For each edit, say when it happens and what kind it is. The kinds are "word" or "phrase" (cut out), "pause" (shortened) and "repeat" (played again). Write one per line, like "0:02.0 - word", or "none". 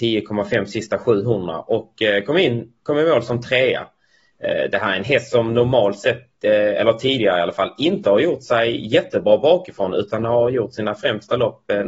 none

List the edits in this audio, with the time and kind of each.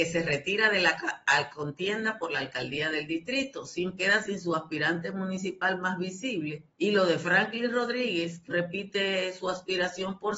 0:04.0 - phrase
0:06.7 - pause
0:08.5 - word

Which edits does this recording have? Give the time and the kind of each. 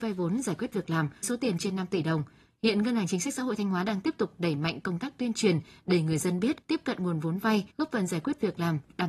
0:01.2 - word
0:06.6 - pause
0:07.7 - pause

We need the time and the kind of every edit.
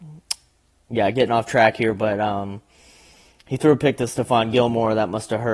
none

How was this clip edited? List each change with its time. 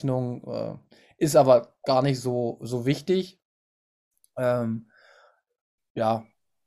none

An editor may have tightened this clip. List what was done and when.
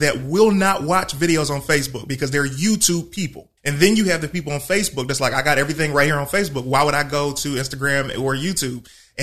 0:03.6 - pause

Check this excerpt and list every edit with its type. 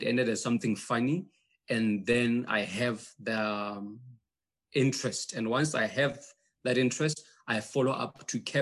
none

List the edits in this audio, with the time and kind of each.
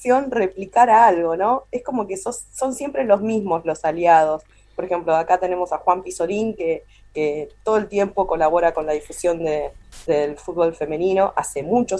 none

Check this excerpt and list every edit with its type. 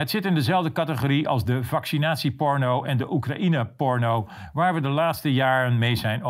none

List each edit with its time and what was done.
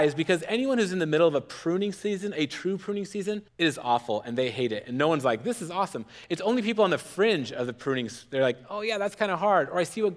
0:03.5 - pause

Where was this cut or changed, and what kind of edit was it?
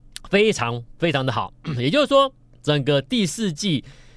none

